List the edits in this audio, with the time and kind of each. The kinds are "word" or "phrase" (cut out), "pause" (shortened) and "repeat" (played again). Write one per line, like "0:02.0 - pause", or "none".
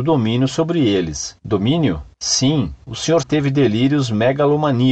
0:03.2 - word